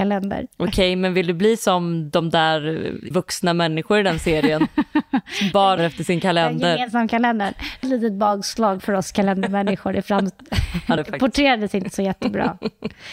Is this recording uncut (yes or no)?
no